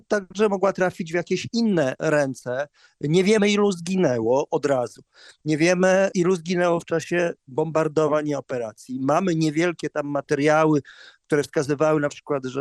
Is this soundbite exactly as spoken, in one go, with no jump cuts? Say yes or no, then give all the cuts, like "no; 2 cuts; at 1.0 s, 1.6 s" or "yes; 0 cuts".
yes; 0 cuts